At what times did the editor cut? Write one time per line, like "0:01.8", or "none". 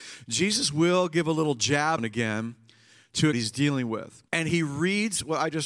0:02.0
0:03.3
0:04.3